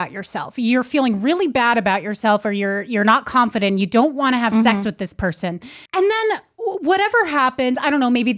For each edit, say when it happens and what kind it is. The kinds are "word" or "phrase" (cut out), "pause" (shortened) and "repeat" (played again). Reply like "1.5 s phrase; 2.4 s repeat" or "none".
5.9 s pause